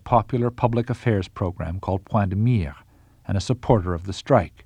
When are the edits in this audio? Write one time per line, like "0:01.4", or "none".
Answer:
none